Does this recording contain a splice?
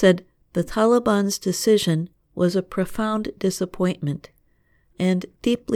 no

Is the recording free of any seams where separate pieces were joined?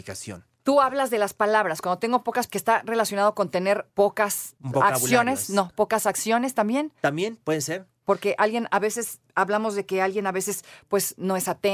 no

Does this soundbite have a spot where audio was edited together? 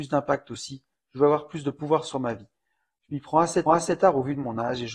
yes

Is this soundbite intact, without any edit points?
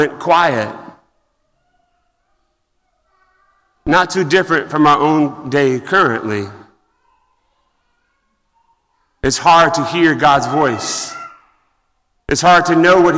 yes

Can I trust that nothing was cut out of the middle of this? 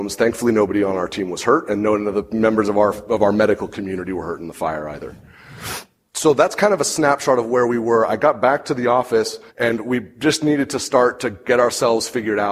no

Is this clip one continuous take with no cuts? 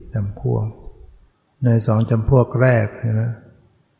no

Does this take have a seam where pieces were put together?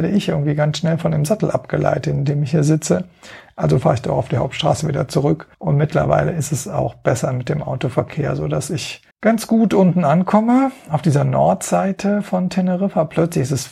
yes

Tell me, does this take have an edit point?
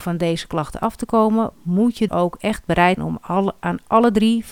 yes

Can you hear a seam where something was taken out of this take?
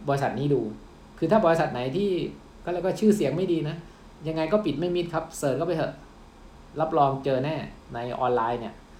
yes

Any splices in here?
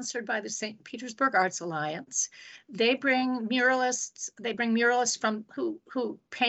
no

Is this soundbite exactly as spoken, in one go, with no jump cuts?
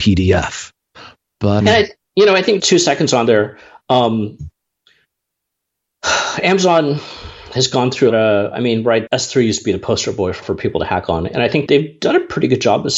no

